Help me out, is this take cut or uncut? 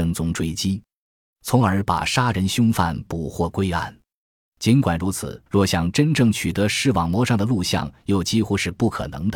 cut